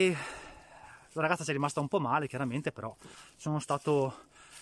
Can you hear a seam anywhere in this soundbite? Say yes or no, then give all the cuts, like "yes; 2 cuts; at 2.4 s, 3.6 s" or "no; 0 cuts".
no; 0 cuts